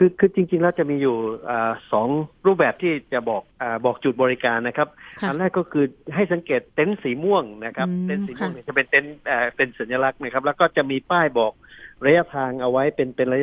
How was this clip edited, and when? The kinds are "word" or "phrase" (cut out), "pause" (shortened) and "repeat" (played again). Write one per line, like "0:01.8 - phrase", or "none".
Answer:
0:03.5 - pause
0:06.7 - pause